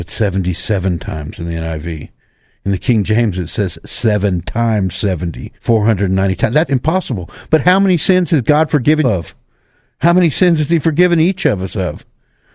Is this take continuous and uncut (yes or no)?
no